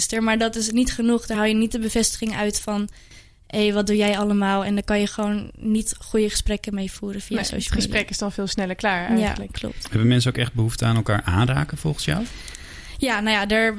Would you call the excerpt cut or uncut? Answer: uncut